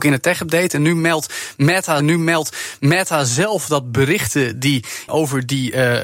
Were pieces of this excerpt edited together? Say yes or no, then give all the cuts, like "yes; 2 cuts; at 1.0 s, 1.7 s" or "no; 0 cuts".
yes; 2 cuts; at 2.0 s, 5.1 s